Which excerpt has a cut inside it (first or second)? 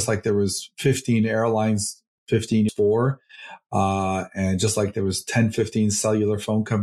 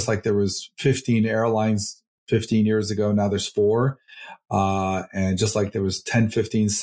first